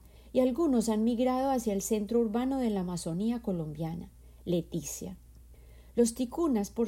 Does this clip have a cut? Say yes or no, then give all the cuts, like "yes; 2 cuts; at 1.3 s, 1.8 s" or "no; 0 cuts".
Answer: no; 0 cuts